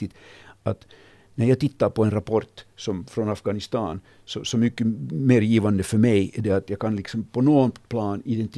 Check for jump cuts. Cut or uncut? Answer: uncut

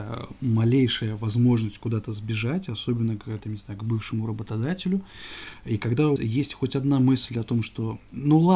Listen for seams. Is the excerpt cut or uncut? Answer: cut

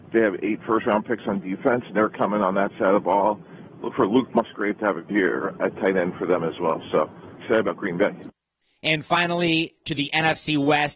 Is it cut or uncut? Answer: cut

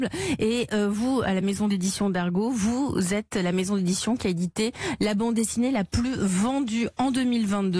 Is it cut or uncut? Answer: uncut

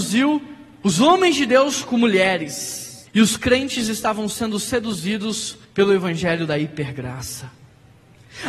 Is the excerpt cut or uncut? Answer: cut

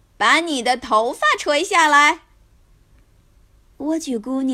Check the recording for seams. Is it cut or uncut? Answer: uncut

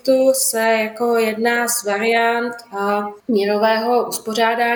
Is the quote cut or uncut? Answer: cut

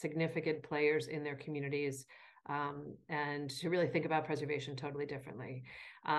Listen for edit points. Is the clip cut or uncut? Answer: uncut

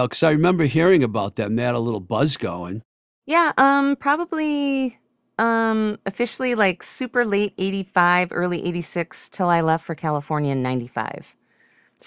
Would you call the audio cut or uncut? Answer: uncut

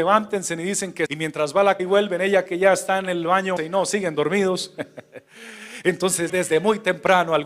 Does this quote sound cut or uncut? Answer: cut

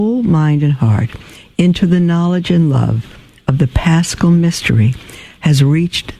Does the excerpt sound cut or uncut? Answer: uncut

